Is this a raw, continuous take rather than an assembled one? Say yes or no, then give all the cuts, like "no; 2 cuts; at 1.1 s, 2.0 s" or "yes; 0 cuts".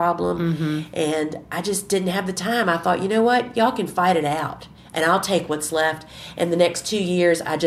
yes; 0 cuts